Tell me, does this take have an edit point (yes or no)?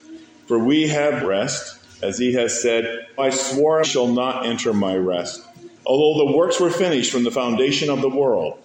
yes